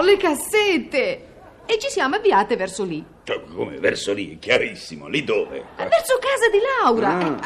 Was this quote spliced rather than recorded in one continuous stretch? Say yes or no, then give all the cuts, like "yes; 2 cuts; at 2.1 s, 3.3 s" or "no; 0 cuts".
no; 0 cuts